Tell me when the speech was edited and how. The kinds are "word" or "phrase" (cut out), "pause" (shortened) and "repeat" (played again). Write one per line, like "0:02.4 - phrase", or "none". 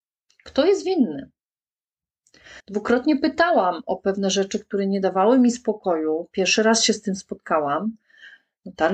0:02.6 - pause